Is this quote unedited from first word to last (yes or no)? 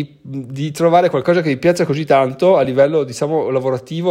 yes